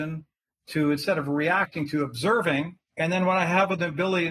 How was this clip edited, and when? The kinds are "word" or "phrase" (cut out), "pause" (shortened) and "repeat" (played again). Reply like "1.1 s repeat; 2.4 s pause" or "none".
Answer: 2.9 s pause